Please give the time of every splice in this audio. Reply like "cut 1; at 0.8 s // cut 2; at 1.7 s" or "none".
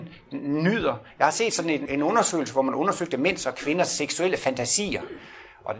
cut 1; at 1.8 s